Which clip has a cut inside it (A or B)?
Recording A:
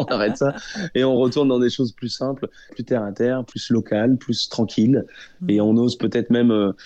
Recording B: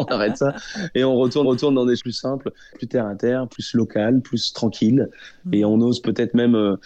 B